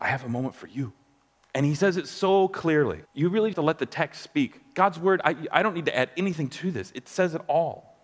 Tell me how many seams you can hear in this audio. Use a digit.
3